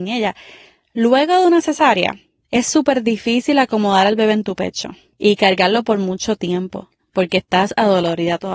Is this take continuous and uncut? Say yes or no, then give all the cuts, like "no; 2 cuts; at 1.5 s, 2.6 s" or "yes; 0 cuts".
yes; 0 cuts